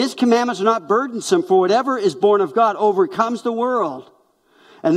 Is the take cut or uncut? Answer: uncut